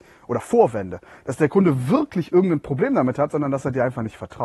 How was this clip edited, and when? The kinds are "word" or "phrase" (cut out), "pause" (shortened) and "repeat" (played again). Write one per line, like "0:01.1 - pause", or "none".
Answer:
none